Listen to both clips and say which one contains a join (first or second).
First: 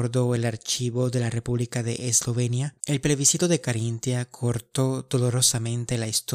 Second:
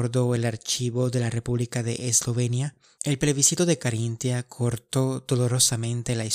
first